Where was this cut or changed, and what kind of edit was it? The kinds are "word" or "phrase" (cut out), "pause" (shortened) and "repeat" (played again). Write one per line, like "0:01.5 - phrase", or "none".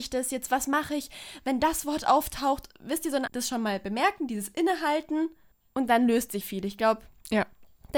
0:03.3 - word
0:05.5 - pause
0:06.4 - word